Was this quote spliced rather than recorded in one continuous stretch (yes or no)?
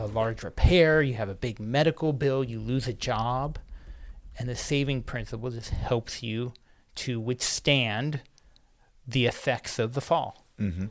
no